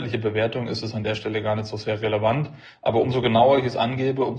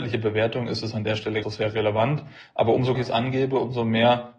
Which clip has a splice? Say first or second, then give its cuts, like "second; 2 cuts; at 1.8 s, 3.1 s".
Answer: second; 2 cuts; at 1.4 s, 2.9 s